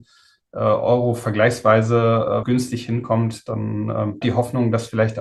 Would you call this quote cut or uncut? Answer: cut